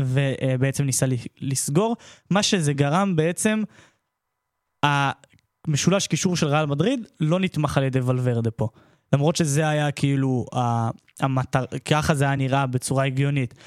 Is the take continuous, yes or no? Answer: yes